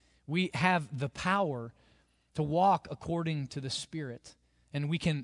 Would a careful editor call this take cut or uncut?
uncut